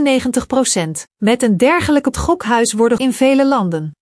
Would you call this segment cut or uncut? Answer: cut